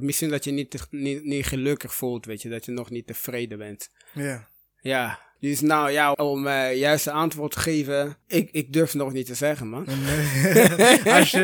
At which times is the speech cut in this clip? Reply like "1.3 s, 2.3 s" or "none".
5.4 s, 6.1 s, 8.2 s